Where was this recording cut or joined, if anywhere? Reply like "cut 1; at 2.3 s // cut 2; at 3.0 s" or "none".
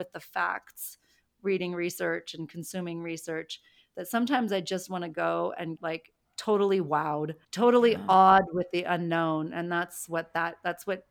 cut 1; at 5.8 s // cut 2; at 6.3 s // cut 3; at 7.4 s